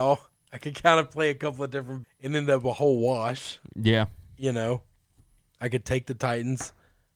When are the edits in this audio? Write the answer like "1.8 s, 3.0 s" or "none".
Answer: 2.0 s